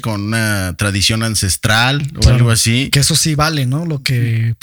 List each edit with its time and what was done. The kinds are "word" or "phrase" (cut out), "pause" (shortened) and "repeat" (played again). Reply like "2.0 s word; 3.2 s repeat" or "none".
none